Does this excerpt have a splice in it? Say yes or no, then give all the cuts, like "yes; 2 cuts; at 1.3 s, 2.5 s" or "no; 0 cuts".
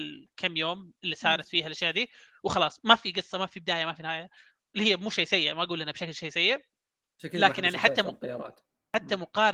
no; 0 cuts